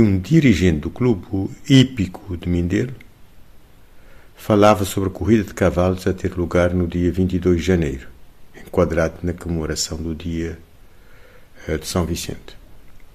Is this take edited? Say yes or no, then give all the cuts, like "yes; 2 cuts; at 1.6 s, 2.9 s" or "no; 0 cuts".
no; 0 cuts